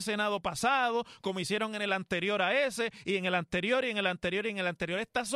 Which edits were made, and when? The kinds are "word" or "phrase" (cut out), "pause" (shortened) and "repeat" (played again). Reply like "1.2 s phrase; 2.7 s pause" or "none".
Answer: none